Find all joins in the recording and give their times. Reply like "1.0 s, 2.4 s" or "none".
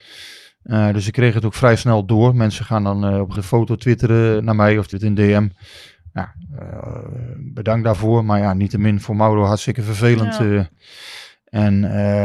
3.4 s, 4.4 s, 4.9 s